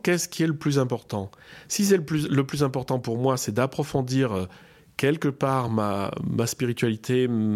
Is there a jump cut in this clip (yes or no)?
no